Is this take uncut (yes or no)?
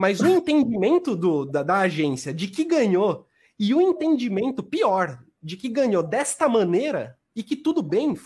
yes